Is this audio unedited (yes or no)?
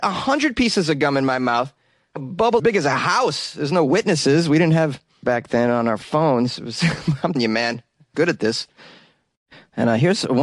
no